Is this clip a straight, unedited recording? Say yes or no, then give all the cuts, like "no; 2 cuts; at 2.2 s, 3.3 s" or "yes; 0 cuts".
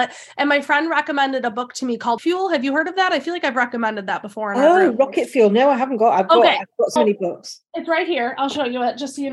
no; 2 cuts; at 2.2 s, 7.0 s